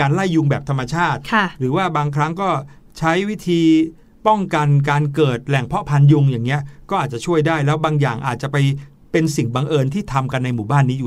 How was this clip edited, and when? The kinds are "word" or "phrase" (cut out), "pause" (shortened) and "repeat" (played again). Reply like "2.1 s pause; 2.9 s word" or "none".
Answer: none